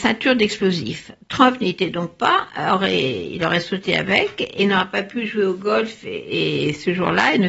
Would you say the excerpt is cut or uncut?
uncut